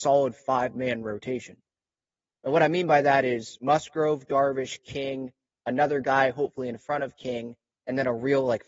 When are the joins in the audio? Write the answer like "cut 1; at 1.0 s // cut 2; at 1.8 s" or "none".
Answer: none